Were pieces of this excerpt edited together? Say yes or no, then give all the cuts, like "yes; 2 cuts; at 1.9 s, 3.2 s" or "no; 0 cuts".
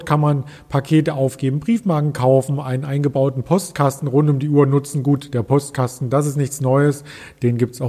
no; 0 cuts